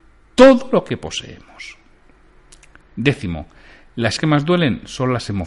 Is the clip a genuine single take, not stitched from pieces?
no; 1 cut; at 4.2 s

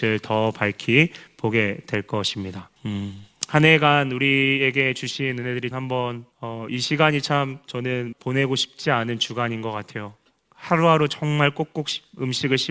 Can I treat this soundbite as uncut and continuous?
no; 4 cuts; at 2.8 s, 5.7 s, 6.3 s, 8.1 s

